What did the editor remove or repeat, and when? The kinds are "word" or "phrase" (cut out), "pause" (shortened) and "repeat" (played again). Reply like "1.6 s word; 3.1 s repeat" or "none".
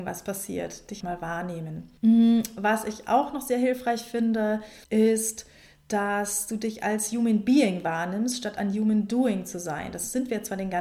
1.0 s word; 2.0 s pause; 4.8 s pause